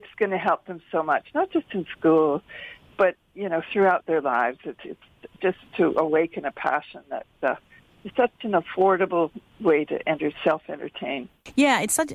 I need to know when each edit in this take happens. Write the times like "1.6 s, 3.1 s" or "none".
none